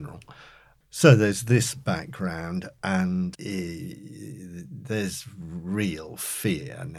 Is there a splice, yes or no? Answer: yes